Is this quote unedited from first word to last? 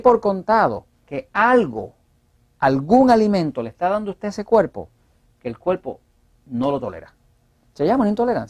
no; 1 cut; at 0.9 s

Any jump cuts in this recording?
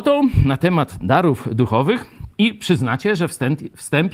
yes; 1 cut; at 2.3 s

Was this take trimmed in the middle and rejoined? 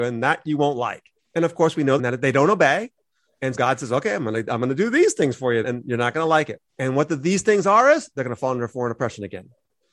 yes; 5 cuts; at 1.2 s, 2.0 s, 3.5 s, 5.6 s, 6.7 s

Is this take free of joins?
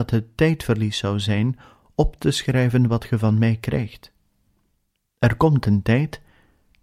yes; 0 cuts

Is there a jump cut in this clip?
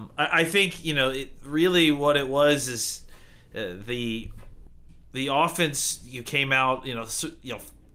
no; 0 cuts

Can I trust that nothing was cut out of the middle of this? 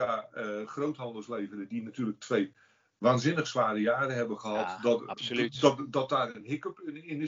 yes; 0 cuts

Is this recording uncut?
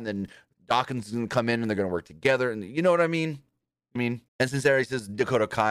no; 2 cuts; at 4.0 s, 4.3 s

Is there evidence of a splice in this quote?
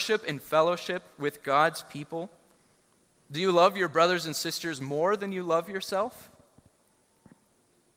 no; 0 cuts

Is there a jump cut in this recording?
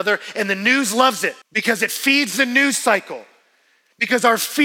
yes; 1 cut; at 1.4 s

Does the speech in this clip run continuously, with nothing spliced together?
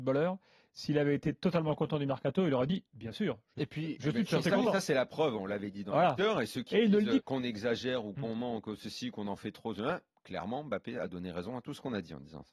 no; 1 cut; at 7.2 s

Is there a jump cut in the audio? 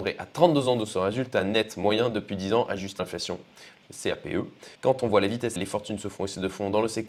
yes; 3 cuts; at 3.0 s, 4.8 s, 5.6 s

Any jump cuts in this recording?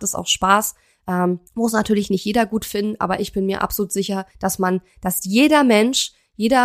yes; 2 cuts; at 1.5 s, 4.3 s

